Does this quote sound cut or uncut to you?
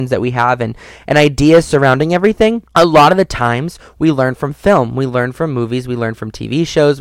cut